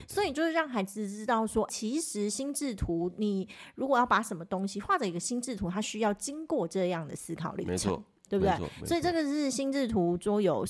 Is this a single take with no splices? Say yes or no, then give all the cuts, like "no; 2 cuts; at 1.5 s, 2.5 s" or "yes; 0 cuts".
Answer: no; 1 cut; at 1.7 s